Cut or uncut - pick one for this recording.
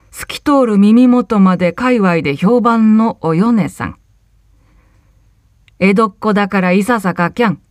uncut